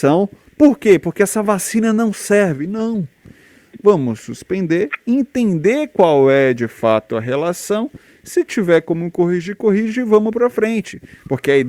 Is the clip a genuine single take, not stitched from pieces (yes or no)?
yes